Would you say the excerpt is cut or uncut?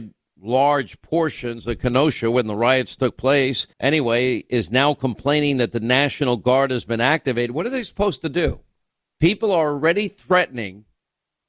cut